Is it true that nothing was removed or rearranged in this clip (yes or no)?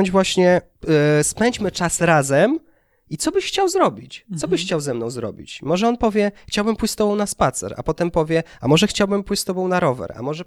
yes